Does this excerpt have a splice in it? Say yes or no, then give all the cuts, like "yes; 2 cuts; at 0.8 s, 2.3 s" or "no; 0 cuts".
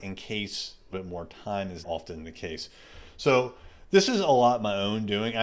yes; 2 cuts; at 0.9 s, 1.8 s